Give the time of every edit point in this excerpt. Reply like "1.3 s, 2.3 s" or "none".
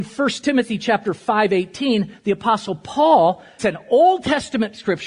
3.6 s